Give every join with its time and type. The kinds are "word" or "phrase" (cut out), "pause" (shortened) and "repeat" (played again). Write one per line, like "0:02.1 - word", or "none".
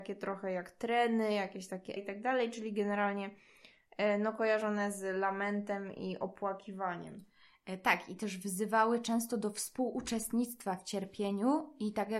0:02.0 - word